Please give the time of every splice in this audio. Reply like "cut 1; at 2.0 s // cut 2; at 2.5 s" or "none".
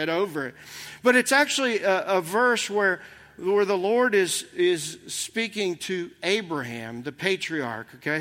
none